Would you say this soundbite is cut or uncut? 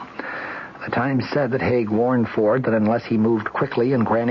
uncut